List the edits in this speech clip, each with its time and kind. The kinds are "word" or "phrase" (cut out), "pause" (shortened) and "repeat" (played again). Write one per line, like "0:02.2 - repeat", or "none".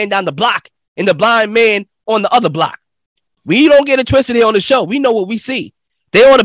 none